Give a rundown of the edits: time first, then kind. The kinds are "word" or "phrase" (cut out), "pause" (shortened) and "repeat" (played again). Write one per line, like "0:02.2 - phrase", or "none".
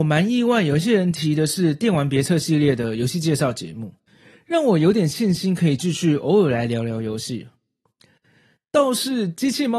none